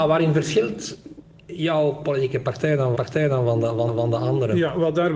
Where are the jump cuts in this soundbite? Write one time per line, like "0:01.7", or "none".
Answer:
0:02.9
0:03.9